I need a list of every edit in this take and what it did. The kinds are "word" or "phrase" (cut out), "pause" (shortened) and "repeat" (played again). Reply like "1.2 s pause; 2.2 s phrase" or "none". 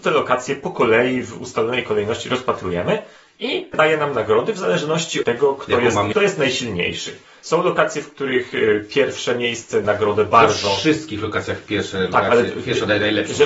3.7 s word; 5.2 s word; 6.1 s word; 9.8 s word